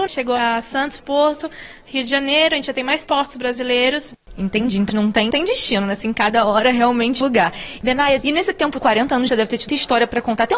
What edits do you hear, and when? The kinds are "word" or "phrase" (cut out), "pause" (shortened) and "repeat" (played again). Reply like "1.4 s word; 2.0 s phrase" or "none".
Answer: 1.0 s word; 3.0 s word; 4.9 s word; 5.3 s word; 7.2 s word; 8.8 s word; 9.3 s phrase; 9.7 s word